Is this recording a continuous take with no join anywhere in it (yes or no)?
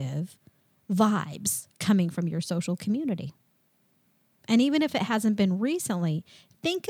yes